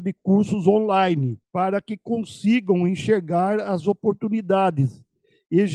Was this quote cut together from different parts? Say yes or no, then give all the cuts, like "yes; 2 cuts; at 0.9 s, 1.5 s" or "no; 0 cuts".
no; 0 cuts